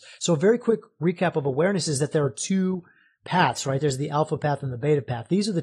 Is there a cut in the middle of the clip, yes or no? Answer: no